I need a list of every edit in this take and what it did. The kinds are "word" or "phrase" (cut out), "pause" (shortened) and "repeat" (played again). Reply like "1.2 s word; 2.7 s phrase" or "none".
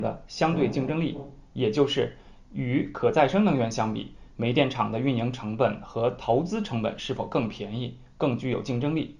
none